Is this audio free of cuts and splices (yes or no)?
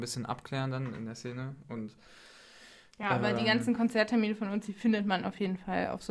yes